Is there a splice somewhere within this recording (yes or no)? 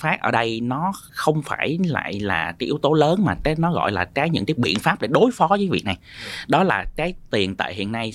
yes